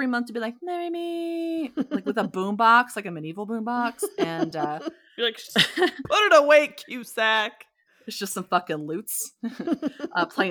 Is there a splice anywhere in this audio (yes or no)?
no